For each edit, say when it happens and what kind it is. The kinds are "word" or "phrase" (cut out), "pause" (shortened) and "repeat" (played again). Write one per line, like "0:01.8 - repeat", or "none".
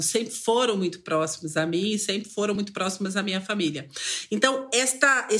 none